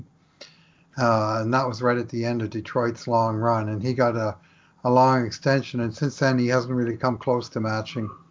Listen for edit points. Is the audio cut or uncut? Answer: uncut